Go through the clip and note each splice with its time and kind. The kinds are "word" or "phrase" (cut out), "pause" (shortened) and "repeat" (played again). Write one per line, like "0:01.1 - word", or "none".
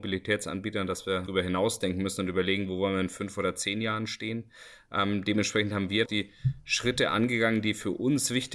0:01.3 - word
0:06.0 - phrase